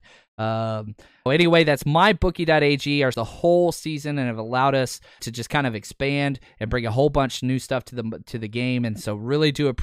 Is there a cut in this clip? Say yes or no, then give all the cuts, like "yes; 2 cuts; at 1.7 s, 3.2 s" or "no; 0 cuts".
yes; 3 cuts; at 1.3 s, 3.1 s, 5.2 s